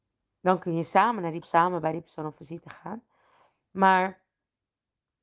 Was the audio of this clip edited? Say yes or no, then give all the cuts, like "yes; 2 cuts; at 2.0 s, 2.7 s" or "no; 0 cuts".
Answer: yes; 1 cut; at 1.4 s